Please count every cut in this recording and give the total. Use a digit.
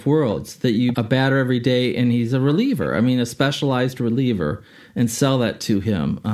1